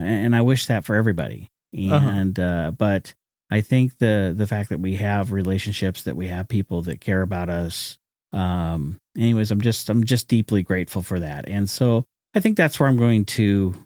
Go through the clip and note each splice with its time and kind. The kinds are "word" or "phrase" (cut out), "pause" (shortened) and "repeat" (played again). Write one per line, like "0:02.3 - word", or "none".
none

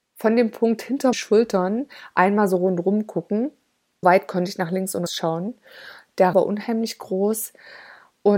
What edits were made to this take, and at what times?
0:01.1 - word
0:04.0 - word
0:05.1 - word
0:06.3 - word

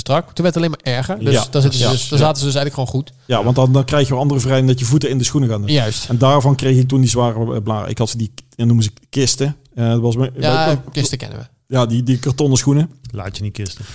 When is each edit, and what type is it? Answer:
none

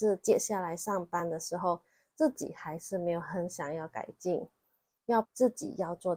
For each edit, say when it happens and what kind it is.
0:05.2 - word

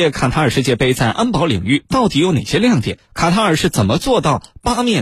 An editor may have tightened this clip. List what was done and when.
none

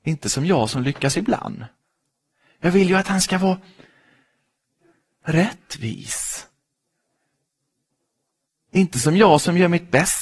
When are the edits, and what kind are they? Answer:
none

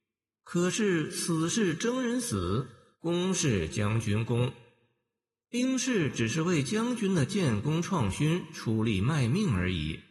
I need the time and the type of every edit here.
none

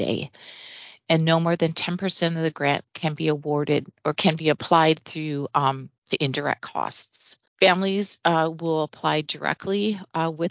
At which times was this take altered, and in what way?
0:02.9 - pause
0:06.0 - pause
0:07.5 - pause

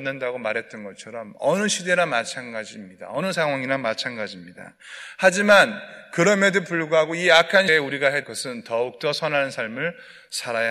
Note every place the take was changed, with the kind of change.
0:07.7 - word
0:08.2 - word

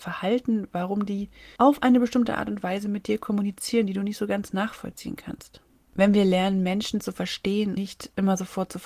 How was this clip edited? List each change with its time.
0:01.6 - pause
0:07.8 - word

